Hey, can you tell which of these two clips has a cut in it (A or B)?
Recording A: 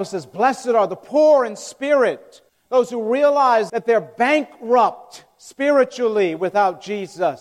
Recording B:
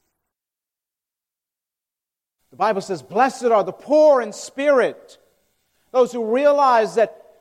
A